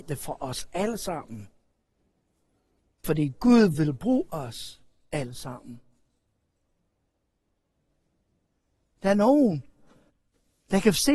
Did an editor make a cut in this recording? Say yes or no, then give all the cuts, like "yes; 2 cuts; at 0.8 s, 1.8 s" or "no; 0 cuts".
no; 0 cuts